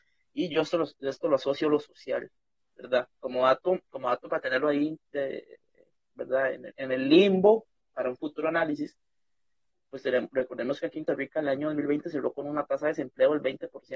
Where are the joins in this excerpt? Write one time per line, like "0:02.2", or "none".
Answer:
0:11.1